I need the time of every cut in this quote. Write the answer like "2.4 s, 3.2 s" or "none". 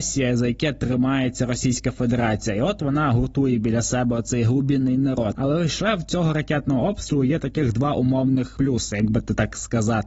none